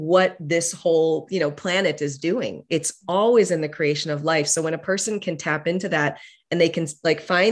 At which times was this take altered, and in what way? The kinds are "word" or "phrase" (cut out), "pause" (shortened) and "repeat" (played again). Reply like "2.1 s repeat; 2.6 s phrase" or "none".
none

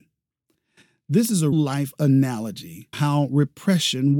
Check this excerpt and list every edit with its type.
1.5 s word; 2.9 s word

